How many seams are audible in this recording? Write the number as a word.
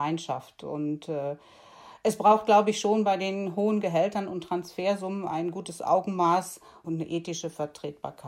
zero